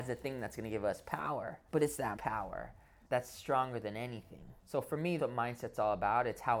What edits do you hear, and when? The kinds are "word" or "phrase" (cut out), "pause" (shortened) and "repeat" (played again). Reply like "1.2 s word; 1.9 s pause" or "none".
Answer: 1.7 s pause; 2.2 s word; 3.1 s word; 4.6 s pause; 5.2 s word